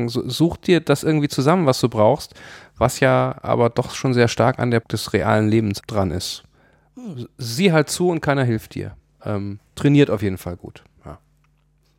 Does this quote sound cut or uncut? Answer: cut